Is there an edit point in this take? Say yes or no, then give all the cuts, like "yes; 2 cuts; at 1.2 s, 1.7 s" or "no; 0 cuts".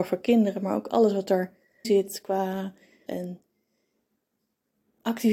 yes; 2 cuts; at 1.8 s, 3.1 s